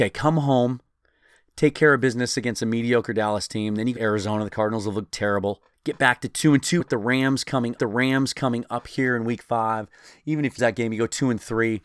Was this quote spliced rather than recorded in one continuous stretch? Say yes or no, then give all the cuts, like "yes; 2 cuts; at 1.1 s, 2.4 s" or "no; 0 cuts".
yes; 5 cuts; at 4.0 s, 5.7 s, 6.8 s, 7.8 s, 10.6 s